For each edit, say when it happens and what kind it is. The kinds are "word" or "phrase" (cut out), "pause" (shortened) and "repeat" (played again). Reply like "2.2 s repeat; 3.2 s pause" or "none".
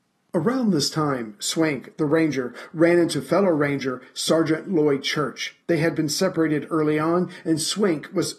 5.6 s pause